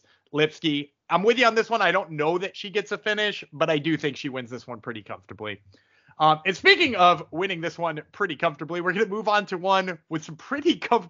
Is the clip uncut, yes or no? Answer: yes